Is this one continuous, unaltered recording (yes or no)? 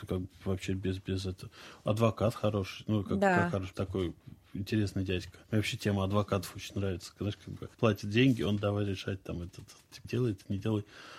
no